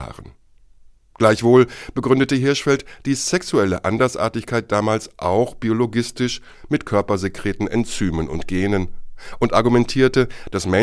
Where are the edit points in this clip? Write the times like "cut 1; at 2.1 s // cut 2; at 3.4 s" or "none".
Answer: none